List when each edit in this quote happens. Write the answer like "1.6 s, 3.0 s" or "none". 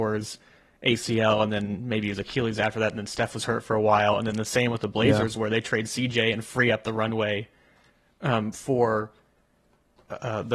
none